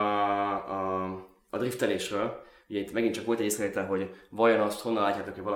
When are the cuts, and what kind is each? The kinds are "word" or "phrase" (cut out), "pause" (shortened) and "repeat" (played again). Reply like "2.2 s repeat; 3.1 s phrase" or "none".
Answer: none